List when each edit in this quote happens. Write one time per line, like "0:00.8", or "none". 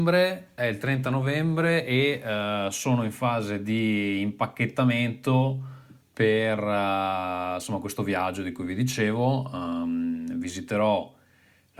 none